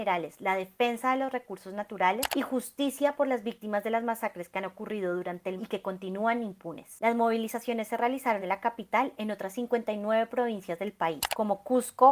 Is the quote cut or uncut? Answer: cut